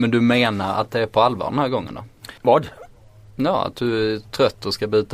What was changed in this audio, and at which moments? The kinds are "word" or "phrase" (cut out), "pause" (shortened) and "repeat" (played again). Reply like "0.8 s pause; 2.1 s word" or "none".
2.4 s pause